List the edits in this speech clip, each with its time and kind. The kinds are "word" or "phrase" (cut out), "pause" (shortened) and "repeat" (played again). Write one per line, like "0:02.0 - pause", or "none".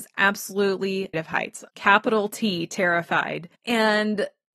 0:01.1 - word
0:01.7 - word